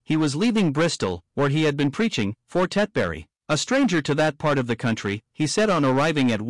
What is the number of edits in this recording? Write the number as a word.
one